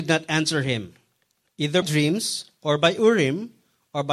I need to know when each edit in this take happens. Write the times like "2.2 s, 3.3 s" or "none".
1.8 s